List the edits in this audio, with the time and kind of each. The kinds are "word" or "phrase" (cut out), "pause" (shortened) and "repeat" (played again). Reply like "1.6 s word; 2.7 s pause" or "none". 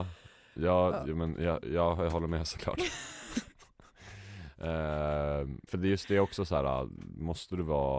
5.7 s word